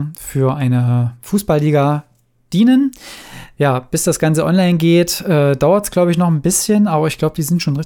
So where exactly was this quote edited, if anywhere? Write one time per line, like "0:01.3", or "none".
none